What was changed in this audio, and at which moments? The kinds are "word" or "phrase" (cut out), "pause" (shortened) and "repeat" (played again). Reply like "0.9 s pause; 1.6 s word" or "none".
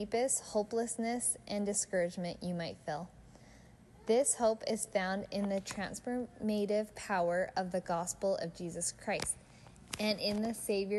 none